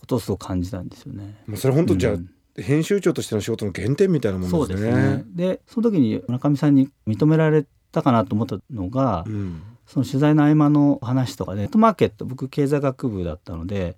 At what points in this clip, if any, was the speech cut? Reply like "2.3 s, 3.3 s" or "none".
11.7 s